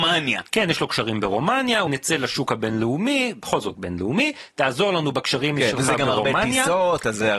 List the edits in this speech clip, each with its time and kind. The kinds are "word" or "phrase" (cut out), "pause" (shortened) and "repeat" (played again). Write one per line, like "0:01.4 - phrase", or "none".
0:01.9 - phrase
0:03.7 - word

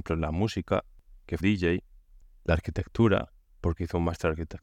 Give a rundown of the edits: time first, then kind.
0:01.4 - word
0:03.4 - pause

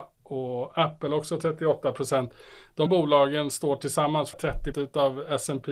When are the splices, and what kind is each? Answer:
0:02.9 - word
0:04.3 - word
0:04.7 - word

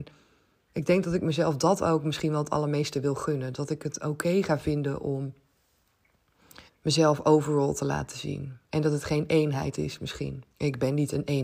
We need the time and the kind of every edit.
0:06.7 - pause
0:08.6 - pause
0:10.5 - pause

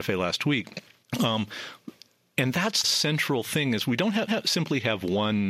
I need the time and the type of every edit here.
0:01.0 - pause
0:02.8 - word
0:04.3 - repeat

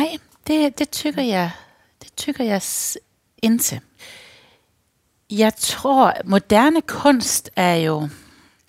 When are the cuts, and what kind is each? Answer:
none

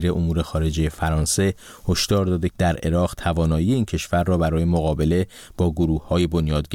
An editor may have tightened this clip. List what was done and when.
0:02.5 - phrase

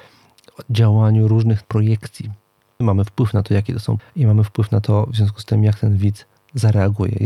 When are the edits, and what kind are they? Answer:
0:01.6 - word
0:02.8 - word
0:04.0 - word

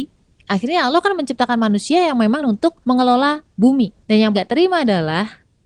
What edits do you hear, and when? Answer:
0:02.4 - word
0:02.8 - pause
0:04.0 - pause
0:04.3 - word

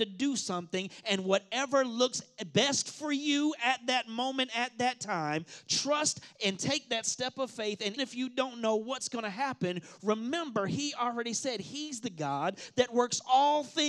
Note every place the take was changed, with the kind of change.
0:08.0 - word

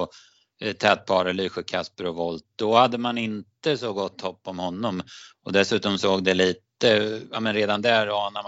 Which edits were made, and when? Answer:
none

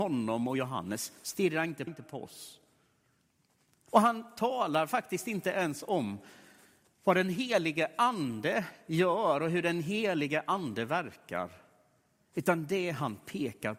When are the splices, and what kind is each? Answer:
0:01.9 - phrase

